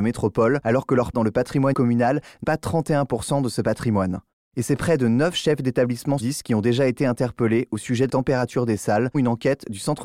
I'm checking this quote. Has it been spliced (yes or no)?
yes